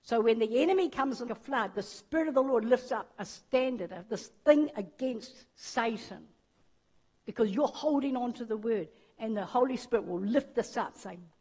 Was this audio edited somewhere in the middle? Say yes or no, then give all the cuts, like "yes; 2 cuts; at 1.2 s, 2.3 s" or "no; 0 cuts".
yes; 2 cuts; at 1.3 s, 5.5 s